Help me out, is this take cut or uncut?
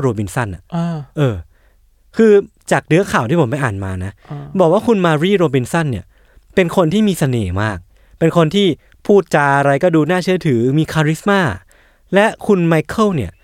uncut